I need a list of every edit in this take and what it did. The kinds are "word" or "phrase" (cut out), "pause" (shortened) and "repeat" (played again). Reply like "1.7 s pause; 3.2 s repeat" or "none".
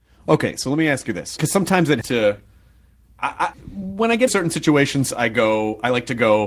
1.4 s word; 2.0 s word; 3.5 s word; 4.3 s word; 5.1 s word